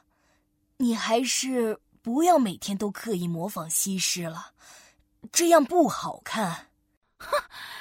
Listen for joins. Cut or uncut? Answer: uncut